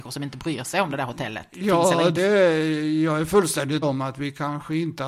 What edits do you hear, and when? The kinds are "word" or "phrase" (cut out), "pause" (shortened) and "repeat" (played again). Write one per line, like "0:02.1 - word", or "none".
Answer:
0:02.2 - word
0:03.8 - word